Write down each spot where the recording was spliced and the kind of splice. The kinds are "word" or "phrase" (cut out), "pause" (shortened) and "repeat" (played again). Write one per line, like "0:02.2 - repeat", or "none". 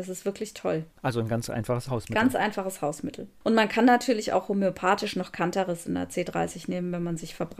0:00.9 - pause